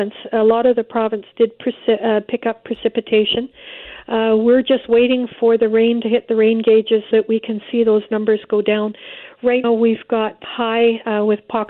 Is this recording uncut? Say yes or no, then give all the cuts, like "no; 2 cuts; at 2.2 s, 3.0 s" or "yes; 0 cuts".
no; 3 cuts; at 7.1 s, 9.6 s, 10.4 s